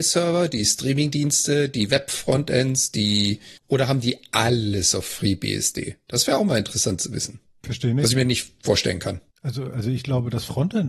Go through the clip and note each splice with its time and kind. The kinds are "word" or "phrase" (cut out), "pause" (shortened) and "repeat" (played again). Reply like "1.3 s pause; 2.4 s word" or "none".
3.6 s pause; 9.3 s pause